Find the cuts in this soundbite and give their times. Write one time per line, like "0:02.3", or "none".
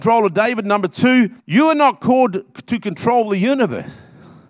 0:01.4